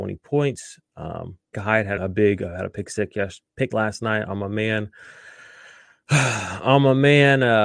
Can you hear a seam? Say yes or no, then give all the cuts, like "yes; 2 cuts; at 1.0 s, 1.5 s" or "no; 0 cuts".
yes; 3 cuts; at 1.5 s, 2.0 s, 3.7 s